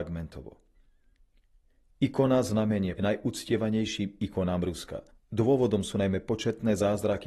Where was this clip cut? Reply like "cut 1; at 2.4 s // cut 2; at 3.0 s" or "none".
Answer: cut 1; at 3.0 s // cut 2; at 5.1 s